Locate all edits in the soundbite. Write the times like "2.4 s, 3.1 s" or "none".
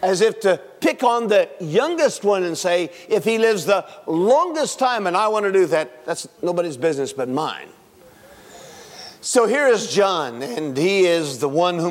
6.4 s